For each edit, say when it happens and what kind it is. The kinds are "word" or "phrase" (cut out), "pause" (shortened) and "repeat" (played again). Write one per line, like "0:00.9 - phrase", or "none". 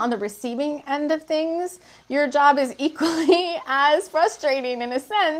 none